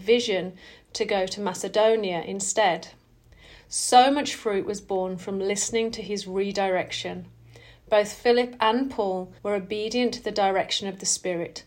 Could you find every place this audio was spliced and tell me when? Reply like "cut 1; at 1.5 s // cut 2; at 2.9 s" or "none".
cut 1; at 9.4 s